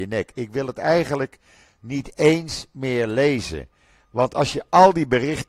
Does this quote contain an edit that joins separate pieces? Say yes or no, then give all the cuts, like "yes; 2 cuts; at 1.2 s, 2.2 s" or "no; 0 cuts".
no; 0 cuts